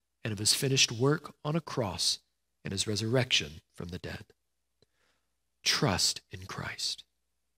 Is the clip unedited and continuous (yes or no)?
yes